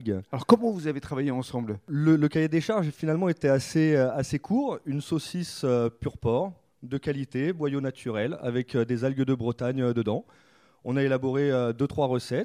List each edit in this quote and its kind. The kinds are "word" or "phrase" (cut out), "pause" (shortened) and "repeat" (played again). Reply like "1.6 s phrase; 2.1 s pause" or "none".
none